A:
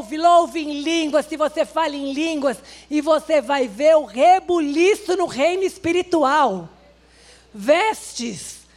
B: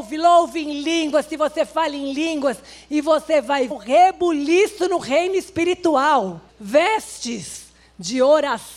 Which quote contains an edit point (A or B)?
B